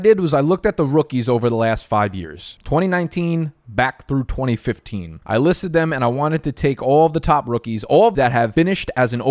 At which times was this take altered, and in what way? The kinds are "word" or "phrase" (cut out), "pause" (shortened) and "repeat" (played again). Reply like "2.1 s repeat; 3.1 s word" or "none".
5.2 s pause; 8.1 s phrase